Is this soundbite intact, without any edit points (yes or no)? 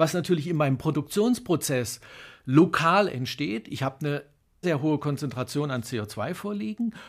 no